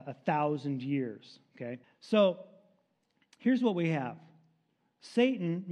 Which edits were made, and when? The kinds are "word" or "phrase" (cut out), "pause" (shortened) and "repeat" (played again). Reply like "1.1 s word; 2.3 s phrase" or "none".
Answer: 1.8 s pause